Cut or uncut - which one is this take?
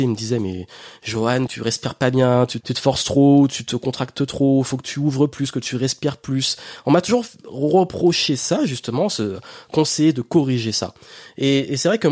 cut